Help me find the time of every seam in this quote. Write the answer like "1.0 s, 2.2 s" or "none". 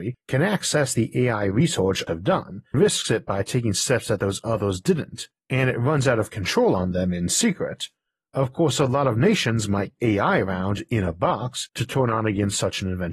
2.1 s, 2.7 s, 10.0 s